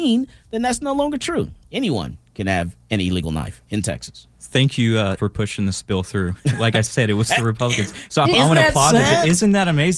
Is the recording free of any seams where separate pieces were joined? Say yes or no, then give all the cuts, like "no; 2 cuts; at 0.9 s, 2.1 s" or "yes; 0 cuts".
no; 2 cuts; at 5.2 s, 8.2 s